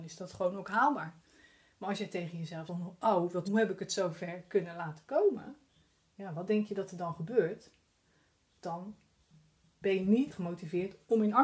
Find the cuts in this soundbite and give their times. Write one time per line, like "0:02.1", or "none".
0:02.7
0:03.4
0:10.3